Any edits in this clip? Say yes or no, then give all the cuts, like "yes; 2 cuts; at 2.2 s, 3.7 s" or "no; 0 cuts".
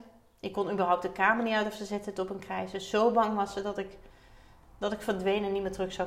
no; 0 cuts